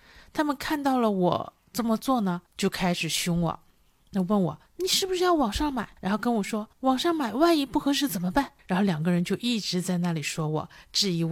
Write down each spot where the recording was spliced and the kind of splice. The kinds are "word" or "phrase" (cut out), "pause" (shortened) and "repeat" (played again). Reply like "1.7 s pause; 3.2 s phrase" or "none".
2.5 s pause; 4.7 s pause; 6.0 s pause; 6.7 s pause; 8.6 s pause